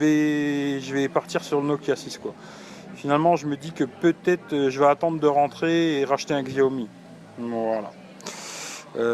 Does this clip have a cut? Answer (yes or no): no